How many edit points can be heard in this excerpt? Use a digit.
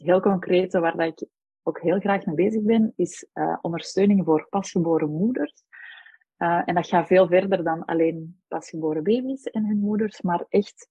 0